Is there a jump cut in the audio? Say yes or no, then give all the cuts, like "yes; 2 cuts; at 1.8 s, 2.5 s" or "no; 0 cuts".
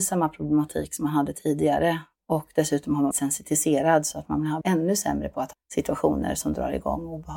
yes; 3 cuts; at 3.1 s, 4.6 s, 5.5 s